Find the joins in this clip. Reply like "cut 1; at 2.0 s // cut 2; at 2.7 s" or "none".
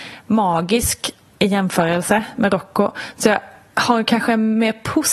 none